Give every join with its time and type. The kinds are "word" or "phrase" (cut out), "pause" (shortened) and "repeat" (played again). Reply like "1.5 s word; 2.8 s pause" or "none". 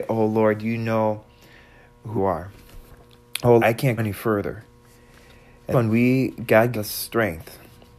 2.2 s word; 3.6 s word; 4.0 s word; 5.7 s word; 6.7 s word